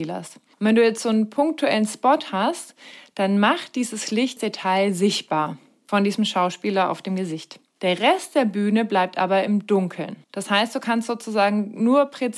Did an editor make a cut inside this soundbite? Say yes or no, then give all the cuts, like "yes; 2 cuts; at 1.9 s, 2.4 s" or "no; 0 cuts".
yes; 2 cuts; at 4.4 s, 10.2 s